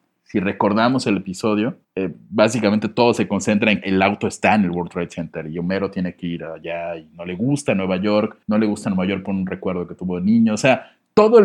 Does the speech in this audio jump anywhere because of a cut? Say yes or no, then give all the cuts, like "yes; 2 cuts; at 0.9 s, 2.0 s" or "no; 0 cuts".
yes; 3 cuts; at 1.8 s, 3.8 s, 8.4 s